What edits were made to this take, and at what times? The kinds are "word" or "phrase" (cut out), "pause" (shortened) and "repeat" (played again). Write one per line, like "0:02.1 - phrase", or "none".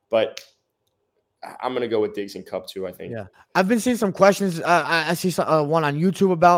0:03.3 - pause